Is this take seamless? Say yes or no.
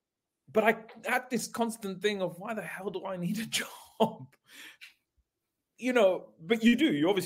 yes